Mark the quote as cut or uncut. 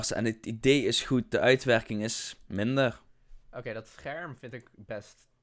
uncut